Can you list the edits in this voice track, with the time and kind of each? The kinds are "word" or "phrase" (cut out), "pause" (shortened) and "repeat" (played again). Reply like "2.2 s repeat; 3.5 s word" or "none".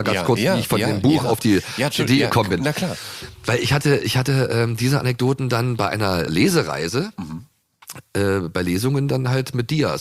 6.3 s word